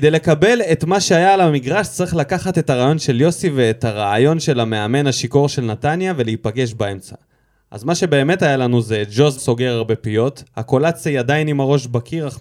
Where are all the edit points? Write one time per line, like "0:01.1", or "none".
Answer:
0:09.4

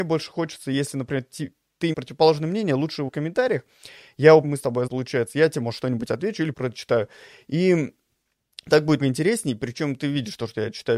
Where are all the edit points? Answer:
0:01.9
0:03.1
0:04.4
0:04.9
0:06.5
0:09.0

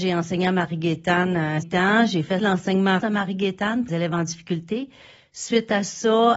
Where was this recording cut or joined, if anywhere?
0:01.6
0:02.4
0:03.0
0:03.9

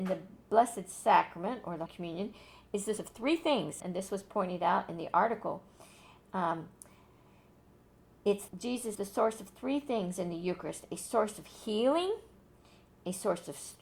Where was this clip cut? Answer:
0:01.9
0:03.0
0:03.8
0:08.5
0:09.0

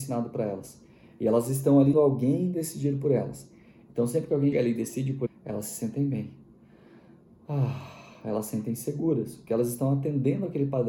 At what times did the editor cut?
0:01.9
0:04.5
0:05.3

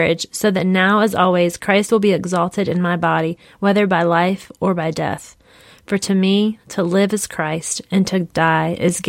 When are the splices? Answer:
none

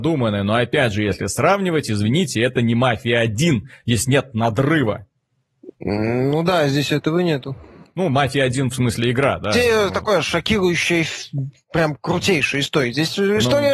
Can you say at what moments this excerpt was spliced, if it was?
none

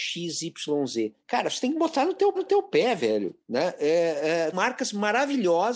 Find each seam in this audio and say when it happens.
0:01.2
0:02.4
0:03.4
0:04.5

